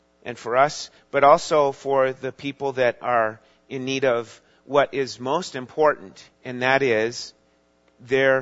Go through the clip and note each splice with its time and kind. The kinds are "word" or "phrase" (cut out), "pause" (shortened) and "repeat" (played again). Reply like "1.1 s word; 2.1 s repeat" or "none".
6.3 s pause